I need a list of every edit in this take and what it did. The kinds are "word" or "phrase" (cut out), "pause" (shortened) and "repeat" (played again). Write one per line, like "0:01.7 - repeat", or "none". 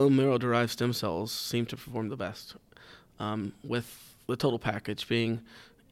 none